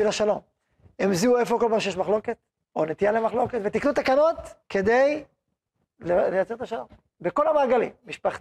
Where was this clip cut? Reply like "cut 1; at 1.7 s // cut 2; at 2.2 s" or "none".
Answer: cut 1; at 4.6 s